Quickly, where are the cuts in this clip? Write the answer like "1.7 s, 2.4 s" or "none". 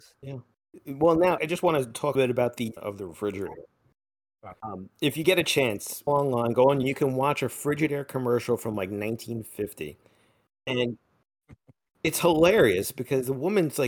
1.4 s, 2.1 s, 2.8 s, 6.1 s, 6.8 s